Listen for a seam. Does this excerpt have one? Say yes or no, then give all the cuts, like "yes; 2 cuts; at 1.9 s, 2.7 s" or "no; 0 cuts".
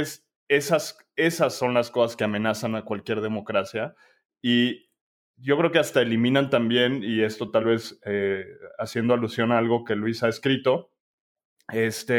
no; 0 cuts